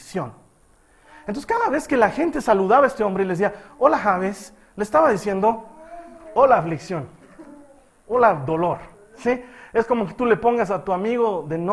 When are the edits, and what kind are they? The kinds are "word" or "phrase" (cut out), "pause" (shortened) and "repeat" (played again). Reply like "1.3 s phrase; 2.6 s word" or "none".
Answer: none